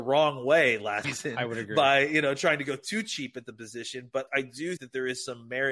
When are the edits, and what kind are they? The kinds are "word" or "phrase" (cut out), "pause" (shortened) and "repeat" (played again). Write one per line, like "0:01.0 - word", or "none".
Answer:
0:01.0 - word
0:04.3 - word
0:04.8 - word